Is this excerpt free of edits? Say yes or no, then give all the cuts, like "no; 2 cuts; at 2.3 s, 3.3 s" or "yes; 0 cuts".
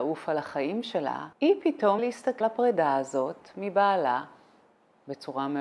no; 3 cuts; at 1.3 s, 2.0 s, 2.4 s